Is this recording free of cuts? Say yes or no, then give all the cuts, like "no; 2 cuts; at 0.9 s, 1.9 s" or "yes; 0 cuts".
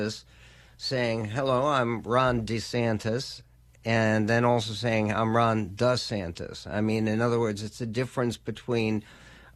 yes; 0 cuts